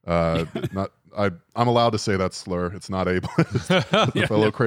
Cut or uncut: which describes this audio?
uncut